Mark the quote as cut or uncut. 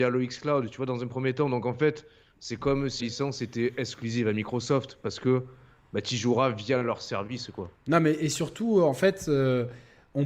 cut